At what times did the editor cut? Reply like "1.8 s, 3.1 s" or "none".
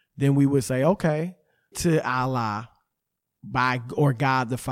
1.7 s